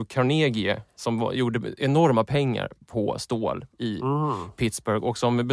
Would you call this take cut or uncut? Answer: cut